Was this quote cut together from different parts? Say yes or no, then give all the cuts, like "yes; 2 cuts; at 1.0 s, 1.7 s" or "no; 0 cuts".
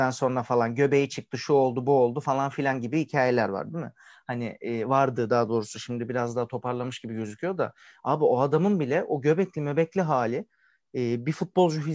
no; 0 cuts